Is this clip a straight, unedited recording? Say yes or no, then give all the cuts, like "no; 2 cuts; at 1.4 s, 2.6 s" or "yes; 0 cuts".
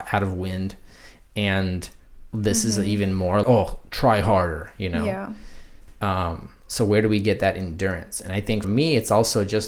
no; 2 cuts; at 3.4 s, 8.6 s